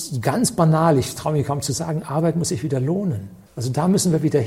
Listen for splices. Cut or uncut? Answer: cut